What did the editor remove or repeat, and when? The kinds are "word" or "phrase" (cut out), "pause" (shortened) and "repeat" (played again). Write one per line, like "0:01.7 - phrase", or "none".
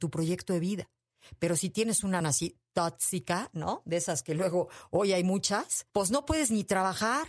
0:02.2 - word
0:05.9 - pause

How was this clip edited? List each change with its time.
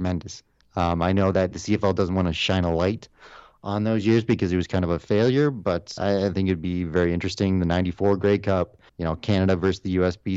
0:01.5 - word
0:06.0 - word
0:08.9 - pause

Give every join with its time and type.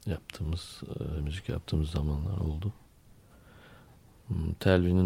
none

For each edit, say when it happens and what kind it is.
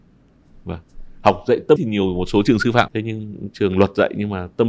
0:01.8 - word
0:02.9 - word

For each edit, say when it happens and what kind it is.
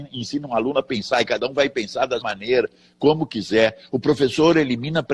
0:02.2 - word

